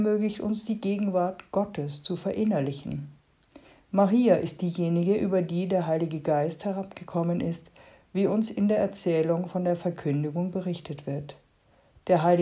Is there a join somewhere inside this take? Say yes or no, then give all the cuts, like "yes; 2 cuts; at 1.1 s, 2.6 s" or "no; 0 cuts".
no; 0 cuts